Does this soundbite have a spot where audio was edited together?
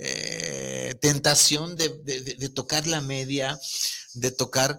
no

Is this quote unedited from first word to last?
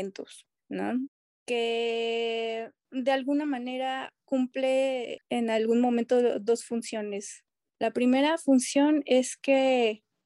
yes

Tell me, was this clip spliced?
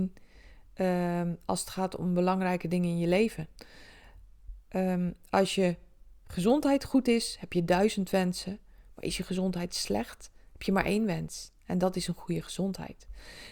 no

